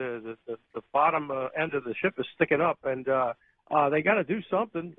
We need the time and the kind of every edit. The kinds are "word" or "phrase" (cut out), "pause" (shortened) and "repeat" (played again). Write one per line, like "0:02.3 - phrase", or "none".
0:03.4 - pause